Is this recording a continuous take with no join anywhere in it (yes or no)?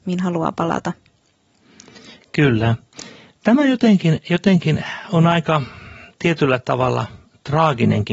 yes